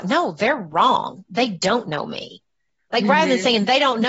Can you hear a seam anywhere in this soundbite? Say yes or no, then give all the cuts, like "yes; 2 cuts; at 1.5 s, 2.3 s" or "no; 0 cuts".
no; 0 cuts